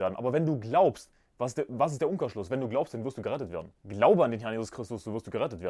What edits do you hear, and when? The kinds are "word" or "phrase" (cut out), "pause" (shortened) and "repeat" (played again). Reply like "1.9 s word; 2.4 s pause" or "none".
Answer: 3.8 s pause